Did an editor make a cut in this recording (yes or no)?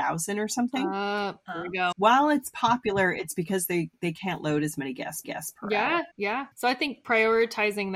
yes